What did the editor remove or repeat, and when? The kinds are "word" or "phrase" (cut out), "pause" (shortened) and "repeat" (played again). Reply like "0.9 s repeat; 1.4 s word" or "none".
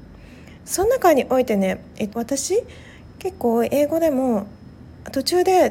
2.1 s phrase